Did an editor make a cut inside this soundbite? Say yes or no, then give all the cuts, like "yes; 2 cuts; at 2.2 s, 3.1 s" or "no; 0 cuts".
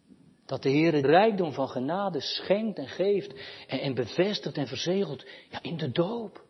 yes; 1 cut; at 1.0 s